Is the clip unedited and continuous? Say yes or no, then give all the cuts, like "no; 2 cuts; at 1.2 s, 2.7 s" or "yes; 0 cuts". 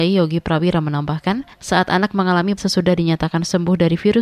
no; 2 cuts; at 1.5 s, 2.6 s